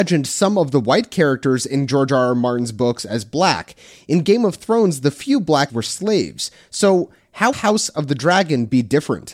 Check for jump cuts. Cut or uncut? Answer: cut